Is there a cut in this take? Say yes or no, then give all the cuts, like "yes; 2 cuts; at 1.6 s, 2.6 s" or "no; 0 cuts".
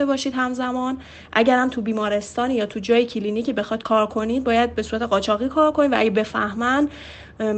no; 0 cuts